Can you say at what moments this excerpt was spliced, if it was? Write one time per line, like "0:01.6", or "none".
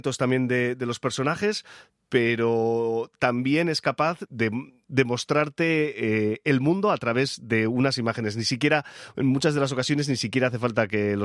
0:04.3